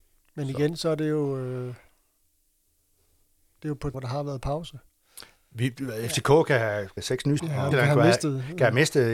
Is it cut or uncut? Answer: cut